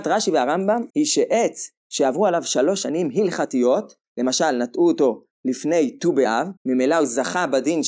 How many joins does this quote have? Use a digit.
2